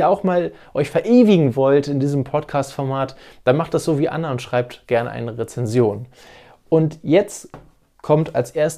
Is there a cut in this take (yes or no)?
no